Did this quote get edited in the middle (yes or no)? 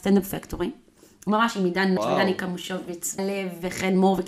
yes